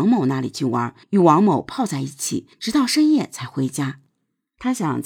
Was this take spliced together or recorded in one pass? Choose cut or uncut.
cut